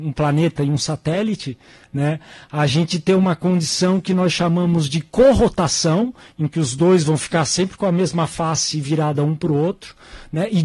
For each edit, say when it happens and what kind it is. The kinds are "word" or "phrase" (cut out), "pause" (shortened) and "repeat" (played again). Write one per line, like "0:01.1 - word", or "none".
none